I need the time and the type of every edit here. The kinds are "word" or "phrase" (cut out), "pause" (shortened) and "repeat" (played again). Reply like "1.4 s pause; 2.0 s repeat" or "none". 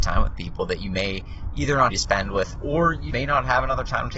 1.9 s phrase; 2.6 s word; 3.1 s word